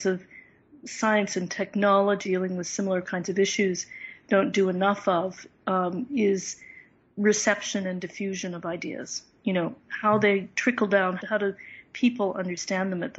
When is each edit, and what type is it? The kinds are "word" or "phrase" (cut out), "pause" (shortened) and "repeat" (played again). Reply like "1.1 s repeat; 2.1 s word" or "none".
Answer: 2.2 s word; 11.2 s word